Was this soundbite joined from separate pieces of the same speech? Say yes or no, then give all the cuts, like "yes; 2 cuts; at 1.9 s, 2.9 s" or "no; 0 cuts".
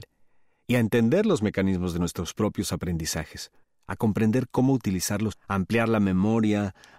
yes; 2 cuts; at 3.6 s, 5.3 s